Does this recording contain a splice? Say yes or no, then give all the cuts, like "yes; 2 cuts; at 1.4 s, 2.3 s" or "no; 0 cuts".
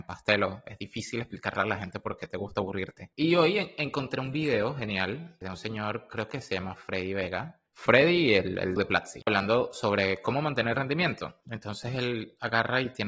yes; 4 cuts; at 7.7 s, 8.8 s, 9.3 s, 10.7 s